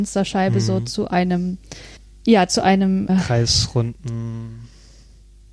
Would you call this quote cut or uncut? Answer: cut